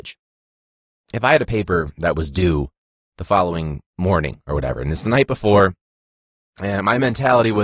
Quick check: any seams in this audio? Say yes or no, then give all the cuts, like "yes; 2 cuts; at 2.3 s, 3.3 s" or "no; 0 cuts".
no; 0 cuts